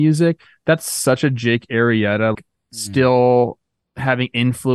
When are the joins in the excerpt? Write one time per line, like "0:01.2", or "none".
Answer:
0:02.3